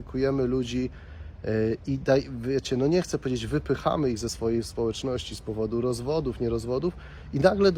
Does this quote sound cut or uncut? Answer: uncut